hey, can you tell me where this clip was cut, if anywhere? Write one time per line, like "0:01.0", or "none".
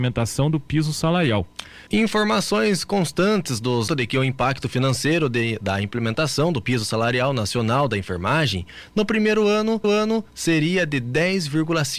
0:01.9
0:03.9
0:09.8

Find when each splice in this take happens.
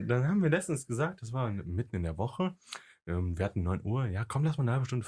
none

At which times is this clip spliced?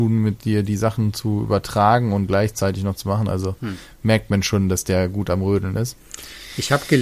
none

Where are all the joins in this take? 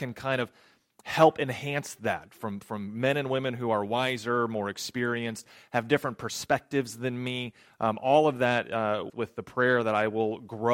0:09.1

